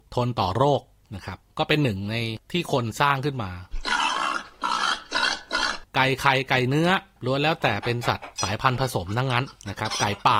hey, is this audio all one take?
no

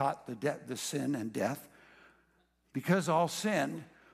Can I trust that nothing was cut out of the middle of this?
yes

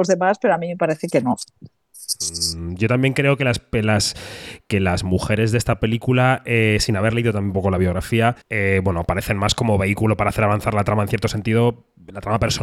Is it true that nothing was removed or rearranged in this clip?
no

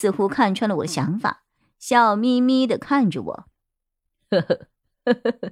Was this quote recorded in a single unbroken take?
yes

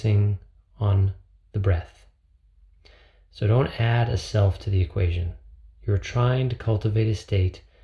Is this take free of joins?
yes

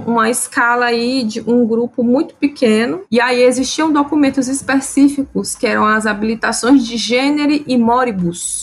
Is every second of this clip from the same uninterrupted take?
yes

